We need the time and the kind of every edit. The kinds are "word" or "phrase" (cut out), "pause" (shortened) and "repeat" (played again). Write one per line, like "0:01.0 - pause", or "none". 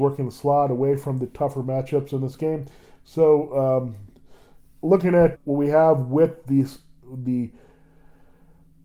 0:05.3 - word